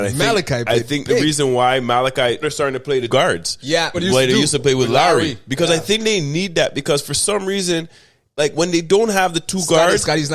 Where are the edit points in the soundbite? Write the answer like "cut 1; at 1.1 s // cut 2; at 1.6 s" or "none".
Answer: cut 1; at 2.4 s // cut 2; at 3.1 s // cut 3; at 3.9 s